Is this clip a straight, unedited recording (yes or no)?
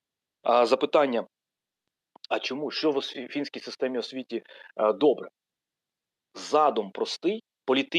yes